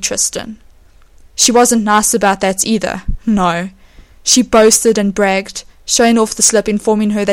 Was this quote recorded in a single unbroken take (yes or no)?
yes